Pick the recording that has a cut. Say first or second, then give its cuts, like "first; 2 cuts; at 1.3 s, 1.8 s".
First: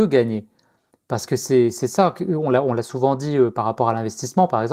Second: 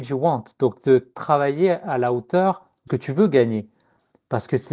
second; 1 cut; at 2.9 s